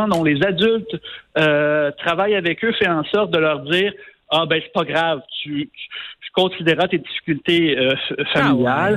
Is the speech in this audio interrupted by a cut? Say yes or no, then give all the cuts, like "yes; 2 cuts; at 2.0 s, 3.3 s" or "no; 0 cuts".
no; 0 cuts